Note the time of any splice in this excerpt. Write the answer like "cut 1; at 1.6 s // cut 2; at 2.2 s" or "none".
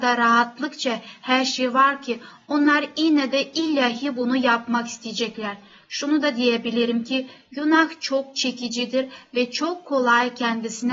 none